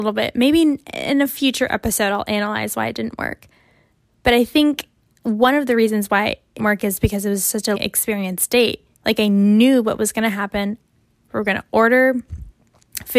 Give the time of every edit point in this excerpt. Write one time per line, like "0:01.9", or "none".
0:06.6
0:07.7
0:08.9